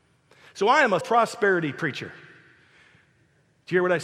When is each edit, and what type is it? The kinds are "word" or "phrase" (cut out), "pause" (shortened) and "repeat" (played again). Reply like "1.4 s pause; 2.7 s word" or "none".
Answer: 1.0 s word